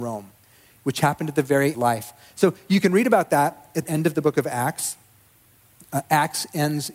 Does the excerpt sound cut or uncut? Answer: cut